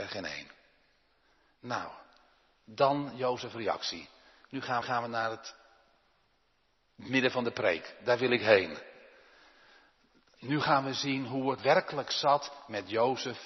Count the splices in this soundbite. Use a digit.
2